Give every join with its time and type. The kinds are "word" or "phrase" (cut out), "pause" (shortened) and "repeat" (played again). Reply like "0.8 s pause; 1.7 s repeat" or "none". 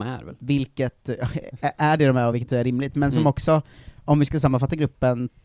none